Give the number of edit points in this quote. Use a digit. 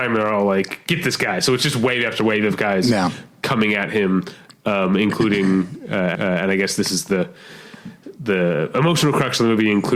1